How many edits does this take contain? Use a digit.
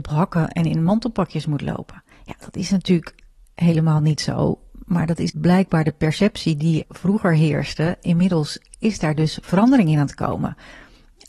3